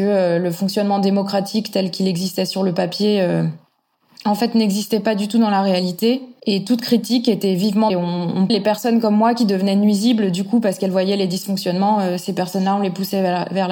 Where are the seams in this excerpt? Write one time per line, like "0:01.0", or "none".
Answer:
0:07.9
0:08.5